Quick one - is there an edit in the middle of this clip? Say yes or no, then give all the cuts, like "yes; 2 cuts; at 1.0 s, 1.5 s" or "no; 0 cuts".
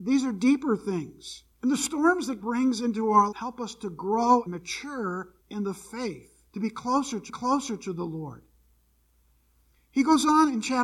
yes; 7 cuts; at 1.5 s, 2.4 s, 3.3 s, 4.5 s, 5.4 s, 6.5 s, 7.3 s